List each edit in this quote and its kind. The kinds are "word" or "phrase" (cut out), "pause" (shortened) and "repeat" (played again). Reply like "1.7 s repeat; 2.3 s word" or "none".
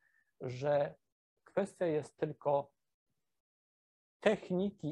none